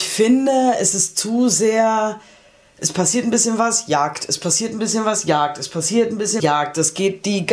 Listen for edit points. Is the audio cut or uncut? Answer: cut